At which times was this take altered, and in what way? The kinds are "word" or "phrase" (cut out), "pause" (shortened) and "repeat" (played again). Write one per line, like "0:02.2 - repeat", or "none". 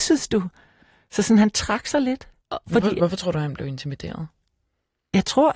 0:02.4 - pause